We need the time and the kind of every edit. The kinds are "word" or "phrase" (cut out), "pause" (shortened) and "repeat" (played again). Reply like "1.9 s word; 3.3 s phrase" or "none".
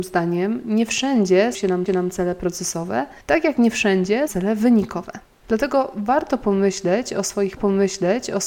1.5 s word; 1.9 s repeat; 3.2 s pause; 4.3 s phrase; 5.3 s pause; 7.6 s repeat

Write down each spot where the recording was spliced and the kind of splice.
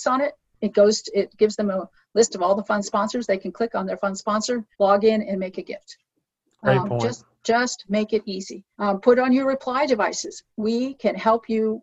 4.7 s pause; 7.3 s pause; 8.7 s pause; 10.5 s pause

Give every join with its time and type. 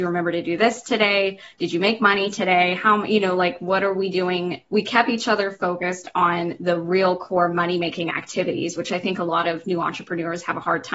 4.7 s pause

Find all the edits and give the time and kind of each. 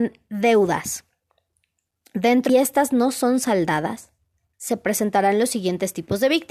2.5 s phrase

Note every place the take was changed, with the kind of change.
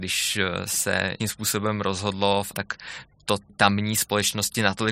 1.2 s word; 2.5 s word; 3.5 s word

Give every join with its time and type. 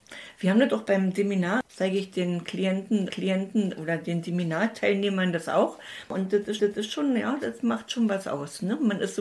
1.7 s pause; 3.1 s repeat; 6.6 s repeat

